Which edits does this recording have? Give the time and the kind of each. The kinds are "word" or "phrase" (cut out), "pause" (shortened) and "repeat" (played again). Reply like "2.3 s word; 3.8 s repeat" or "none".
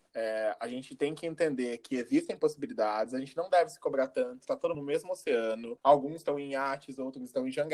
4.7 s word; 5.8 s pause

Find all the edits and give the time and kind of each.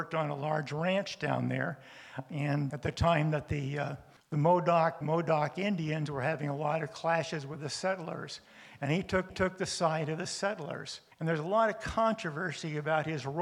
2.7 s word; 4.2 s pause; 5.0 s word; 9.3 s repeat; 11.1 s pause

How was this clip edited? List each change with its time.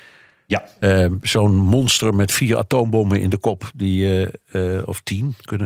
none

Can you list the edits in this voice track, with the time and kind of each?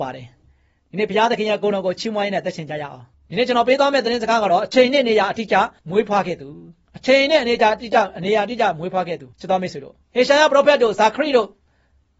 5.8 s pause; 6.9 s pause; 9.3 s pause; 10.0 s pause

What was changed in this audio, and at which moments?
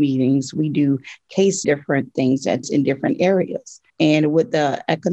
1.6 s phrase; 2.6 s phrase; 3.9 s pause

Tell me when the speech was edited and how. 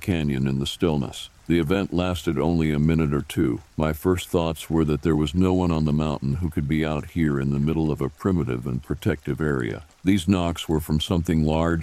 1.4 s pause; 3.7 s pause; 9.9 s pause

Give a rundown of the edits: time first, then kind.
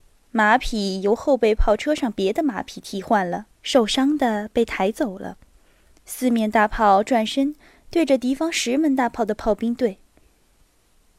3.5 s pause

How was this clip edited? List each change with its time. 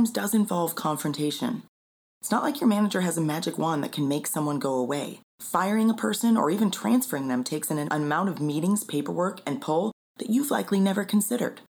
5.3 s pause

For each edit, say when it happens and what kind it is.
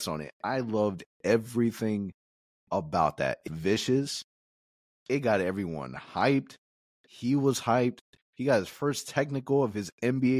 3.5 s word

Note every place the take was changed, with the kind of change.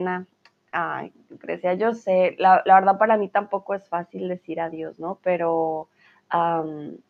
6.0 s pause

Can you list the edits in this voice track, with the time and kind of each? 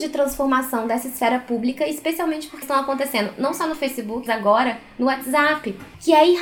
2.6 s word; 4.3 s word

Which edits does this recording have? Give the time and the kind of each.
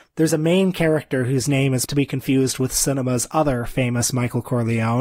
1.9 s phrase

